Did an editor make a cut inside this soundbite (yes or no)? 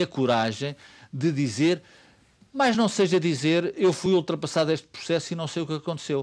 no